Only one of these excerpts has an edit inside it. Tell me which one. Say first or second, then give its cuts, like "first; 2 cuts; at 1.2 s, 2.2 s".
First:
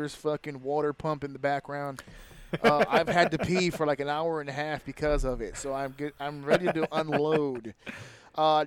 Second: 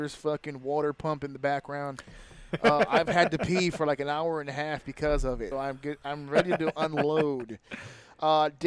second; 1 cut; at 5.5 s